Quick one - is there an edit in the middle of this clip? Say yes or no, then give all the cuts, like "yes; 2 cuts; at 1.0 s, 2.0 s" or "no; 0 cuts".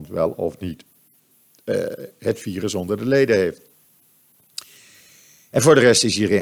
no; 0 cuts